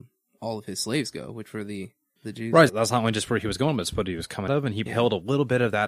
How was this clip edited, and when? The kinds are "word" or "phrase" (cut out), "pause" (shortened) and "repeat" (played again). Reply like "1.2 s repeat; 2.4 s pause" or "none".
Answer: 2.2 s word; 2.7 s word; 4.5 s word; 4.9 s word